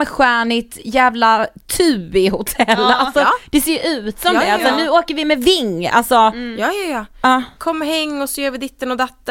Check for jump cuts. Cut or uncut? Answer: uncut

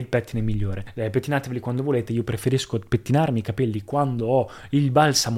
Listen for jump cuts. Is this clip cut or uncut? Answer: uncut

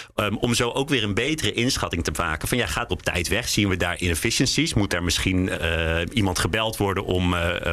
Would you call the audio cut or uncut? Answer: cut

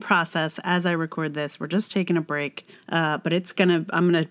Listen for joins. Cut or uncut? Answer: cut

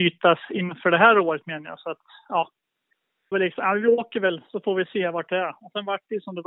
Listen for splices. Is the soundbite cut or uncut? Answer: cut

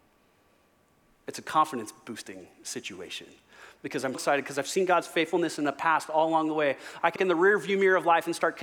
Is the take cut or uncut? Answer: cut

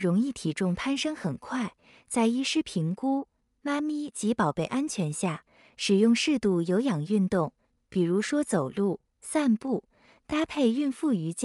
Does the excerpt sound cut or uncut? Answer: uncut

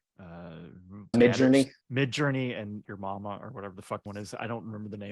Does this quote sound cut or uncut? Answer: cut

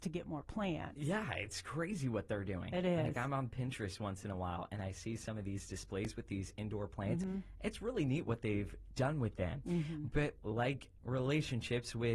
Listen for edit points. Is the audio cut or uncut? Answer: uncut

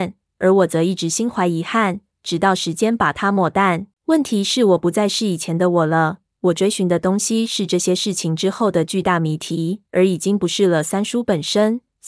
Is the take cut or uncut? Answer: cut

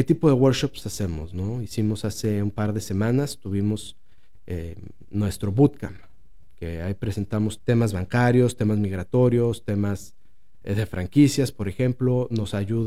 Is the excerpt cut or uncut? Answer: cut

